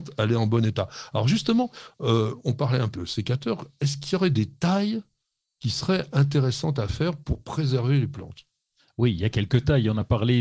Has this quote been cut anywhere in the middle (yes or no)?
yes